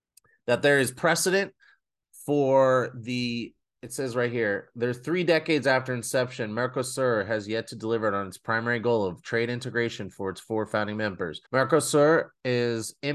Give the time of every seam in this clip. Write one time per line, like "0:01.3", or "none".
0:11.5